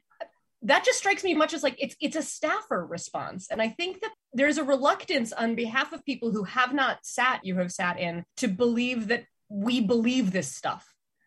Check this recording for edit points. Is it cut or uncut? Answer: cut